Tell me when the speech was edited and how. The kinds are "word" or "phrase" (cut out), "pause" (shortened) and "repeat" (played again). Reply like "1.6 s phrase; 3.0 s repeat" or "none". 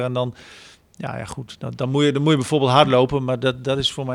none